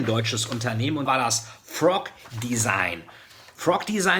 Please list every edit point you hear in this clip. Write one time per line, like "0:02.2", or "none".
0:01.1